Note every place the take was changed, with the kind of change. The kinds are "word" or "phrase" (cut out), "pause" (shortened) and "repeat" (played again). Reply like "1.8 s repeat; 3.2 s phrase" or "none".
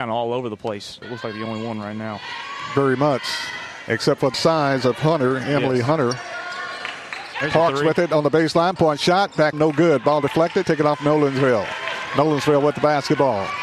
1.0 s phrase; 4.3 s word; 8.8 s phrase; 9.5 s word; 10.6 s word